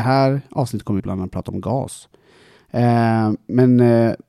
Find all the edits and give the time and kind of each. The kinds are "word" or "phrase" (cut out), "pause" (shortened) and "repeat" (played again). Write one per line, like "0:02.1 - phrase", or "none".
0:01.0 - phrase